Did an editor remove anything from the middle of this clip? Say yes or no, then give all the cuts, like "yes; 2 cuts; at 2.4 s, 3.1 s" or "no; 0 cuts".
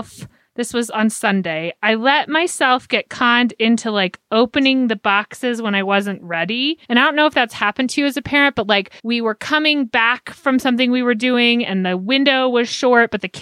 yes; 2 cuts; at 6.8 s, 9.0 s